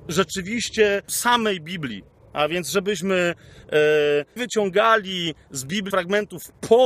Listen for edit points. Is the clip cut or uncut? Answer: cut